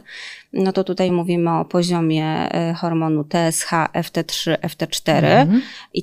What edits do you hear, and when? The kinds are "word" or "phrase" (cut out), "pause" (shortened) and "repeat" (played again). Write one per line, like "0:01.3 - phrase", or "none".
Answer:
none